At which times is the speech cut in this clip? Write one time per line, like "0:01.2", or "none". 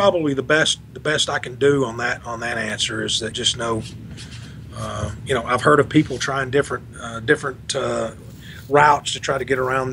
0:03.3